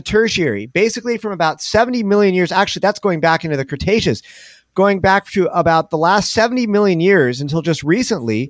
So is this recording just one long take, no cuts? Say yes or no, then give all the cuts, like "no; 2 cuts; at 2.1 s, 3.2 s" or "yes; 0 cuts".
yes; 0 cuts